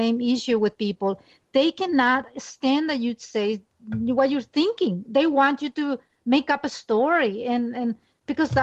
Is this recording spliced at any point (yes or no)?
no